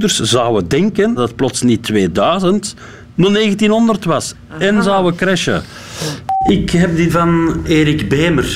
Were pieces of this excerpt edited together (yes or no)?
yes